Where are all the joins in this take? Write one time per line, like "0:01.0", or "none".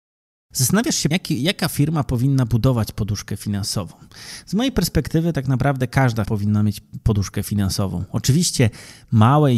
0:01.1
0:06.2